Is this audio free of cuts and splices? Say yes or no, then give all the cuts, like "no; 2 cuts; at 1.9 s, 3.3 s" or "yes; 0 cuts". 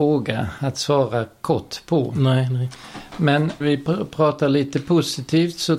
no; 1 cut; at 3.6 s